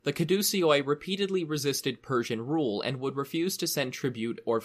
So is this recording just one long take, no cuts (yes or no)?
yes